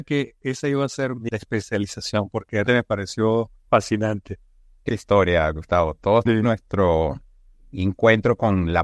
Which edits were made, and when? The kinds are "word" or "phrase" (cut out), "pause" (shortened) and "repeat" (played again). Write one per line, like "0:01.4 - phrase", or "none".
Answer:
0:01.3 - word
0:02.7 - word
0:04.9 - word
0:06.3 - word